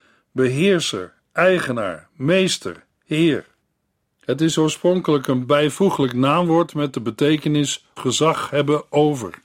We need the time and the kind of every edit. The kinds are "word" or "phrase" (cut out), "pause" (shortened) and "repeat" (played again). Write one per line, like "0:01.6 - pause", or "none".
0:02.9 - word
0:03.6 - pause
0:08.0 - phrase